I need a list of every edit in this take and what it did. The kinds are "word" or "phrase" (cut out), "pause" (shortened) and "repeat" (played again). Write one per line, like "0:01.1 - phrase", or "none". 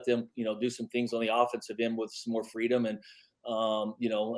none